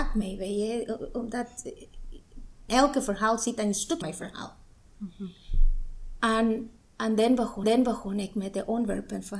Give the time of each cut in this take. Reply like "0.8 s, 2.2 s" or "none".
2.7 s, 4.0 s, 7.6 s

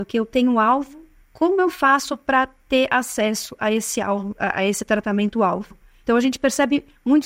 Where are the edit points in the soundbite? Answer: none

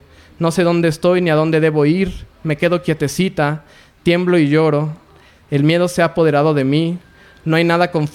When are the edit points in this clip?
none

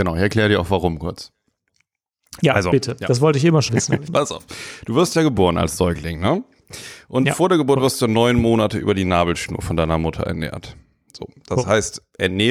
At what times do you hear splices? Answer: 3.7 s, 4.1 s

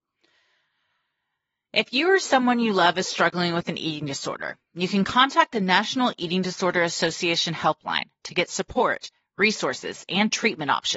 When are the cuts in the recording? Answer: none

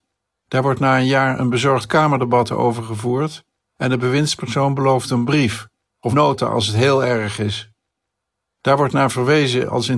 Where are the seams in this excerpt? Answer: 6.1 s

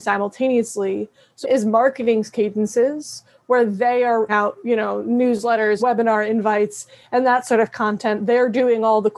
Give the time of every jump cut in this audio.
1.4 s, 4.3 s, 5.8 s

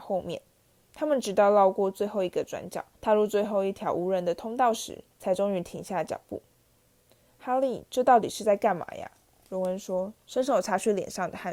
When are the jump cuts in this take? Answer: 2.9 s, 5.1 s, 10.2 s

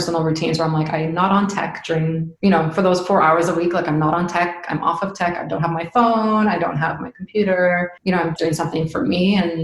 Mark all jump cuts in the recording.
2.4 s, 8.0 s, 8.4 s

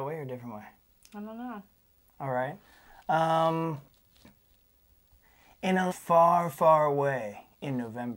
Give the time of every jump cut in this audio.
5.9 s

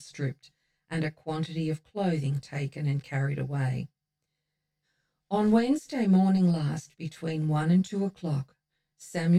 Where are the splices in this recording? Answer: none

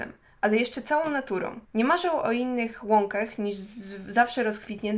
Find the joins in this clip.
1.6 s

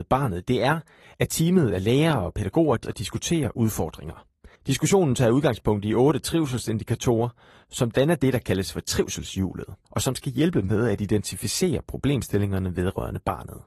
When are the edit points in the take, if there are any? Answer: 2.8 s, 4.6 s

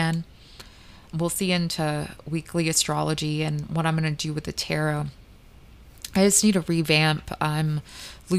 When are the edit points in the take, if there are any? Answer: 1.1 s

